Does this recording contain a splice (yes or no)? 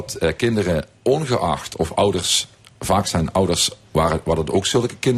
no